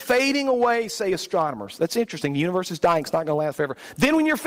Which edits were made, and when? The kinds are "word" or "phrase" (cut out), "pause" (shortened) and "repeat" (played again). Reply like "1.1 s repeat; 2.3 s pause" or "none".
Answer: none